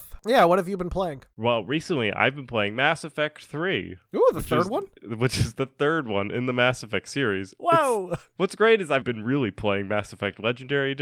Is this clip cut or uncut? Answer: cut